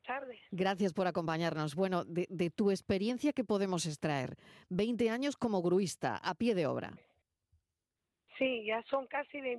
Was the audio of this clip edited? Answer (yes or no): no